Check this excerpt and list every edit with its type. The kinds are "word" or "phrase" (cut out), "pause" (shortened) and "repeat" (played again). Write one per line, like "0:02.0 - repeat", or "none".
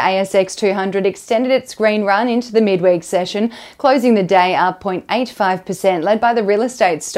none